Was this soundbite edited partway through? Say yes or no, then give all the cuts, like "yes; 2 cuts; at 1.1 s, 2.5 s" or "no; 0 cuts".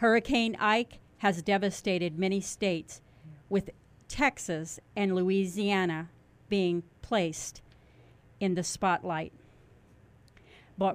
no; 0 cuts